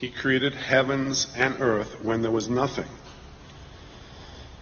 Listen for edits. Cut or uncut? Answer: uncut